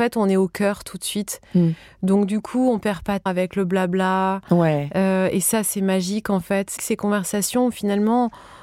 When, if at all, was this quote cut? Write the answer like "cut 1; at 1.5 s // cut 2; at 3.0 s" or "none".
cut 1; at 3.3 s // cut 2; at 6.8 s

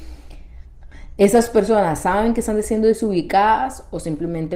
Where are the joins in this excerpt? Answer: none

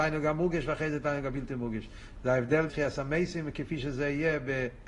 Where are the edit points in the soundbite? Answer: cut 1; at 2.7 s

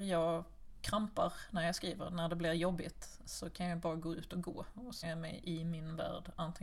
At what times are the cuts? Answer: cut 1; at 5.0 s

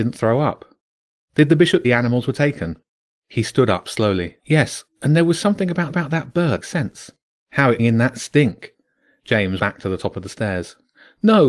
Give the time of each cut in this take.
cut 1; at 1.8 s // cut 2; at 4.4 s // cut 3; at 5.9 s // cut 4; at 6.6 s // cut 5; at 7.2 s // cut 6; at 7.8 s // cut 7; at 9.6 s

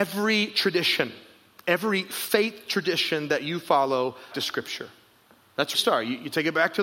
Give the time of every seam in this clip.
cut 1; at 4.3 s // cut 2; at 5.7 s

